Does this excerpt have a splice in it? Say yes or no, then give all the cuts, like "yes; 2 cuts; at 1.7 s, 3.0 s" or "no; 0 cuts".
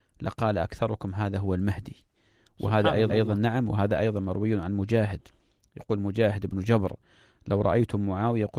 yes; 1 cut; at 3.1 s